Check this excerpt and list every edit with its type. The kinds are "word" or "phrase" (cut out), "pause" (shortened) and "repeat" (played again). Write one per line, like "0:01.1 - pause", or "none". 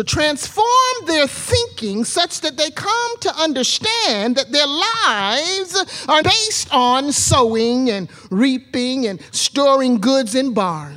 0:06.2 - word